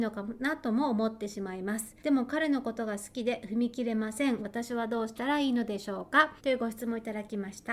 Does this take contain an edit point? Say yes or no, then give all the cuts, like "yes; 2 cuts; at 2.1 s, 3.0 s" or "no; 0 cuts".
yes; 2 cuts; at 2.0 s, 6.4 s